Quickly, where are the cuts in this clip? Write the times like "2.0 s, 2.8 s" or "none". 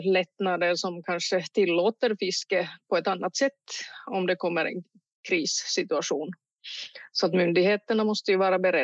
none